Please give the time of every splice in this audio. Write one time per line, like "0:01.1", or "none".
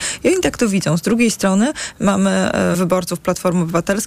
0:02.7